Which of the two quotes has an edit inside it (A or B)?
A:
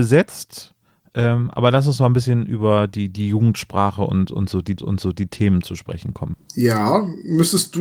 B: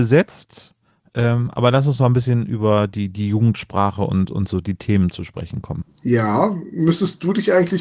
A